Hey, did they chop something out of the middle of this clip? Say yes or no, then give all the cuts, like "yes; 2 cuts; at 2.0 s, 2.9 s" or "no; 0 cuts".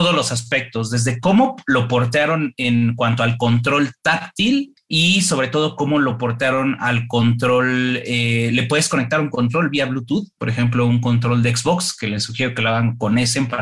no; 0 cuts